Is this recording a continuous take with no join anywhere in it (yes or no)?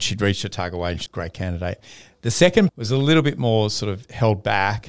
no